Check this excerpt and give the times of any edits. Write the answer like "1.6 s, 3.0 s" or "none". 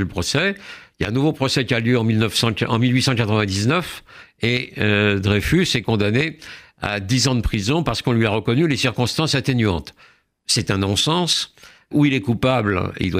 11.9 s